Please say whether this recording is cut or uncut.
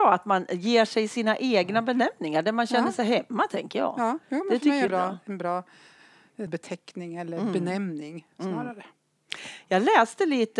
cut